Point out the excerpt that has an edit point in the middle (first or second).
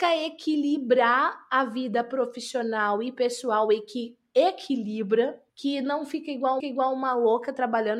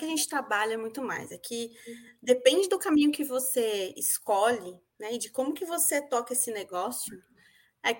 first